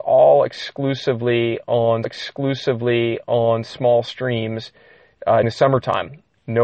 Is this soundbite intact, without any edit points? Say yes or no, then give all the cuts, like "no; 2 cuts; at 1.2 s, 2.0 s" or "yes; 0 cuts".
no; 2 cuts; at 2.0 s, 5.4 s